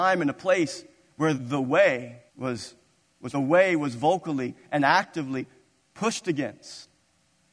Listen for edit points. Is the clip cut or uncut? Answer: cut